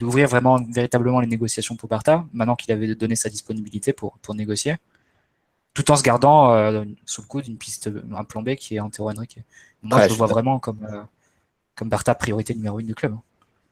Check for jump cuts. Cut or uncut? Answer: uncut